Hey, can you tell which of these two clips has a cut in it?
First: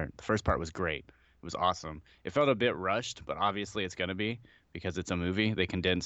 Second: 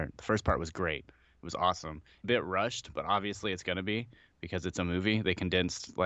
second; 1 cut; at 2.2 s

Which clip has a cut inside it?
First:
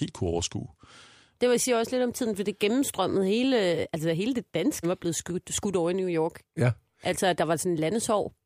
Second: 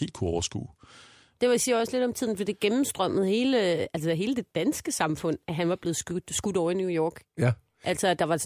first; 1 cut; at 4.8 s

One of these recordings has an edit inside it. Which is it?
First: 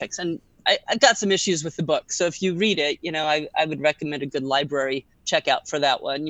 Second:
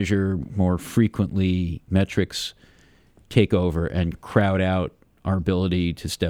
second; 1 cut; at 4.1 s

